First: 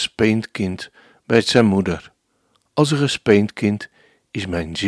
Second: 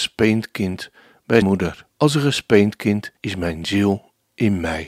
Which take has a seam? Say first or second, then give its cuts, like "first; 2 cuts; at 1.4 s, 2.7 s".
second; 3 cuts; at 1.4 s, 1.9 s, 3.2 s